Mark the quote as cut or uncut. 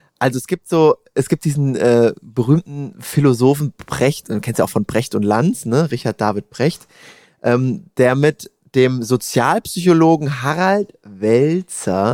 uncut